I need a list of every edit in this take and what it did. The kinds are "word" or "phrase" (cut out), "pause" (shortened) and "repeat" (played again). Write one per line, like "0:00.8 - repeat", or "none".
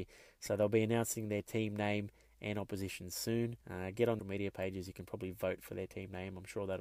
0:03.6 - pause
0:04.2 - phrase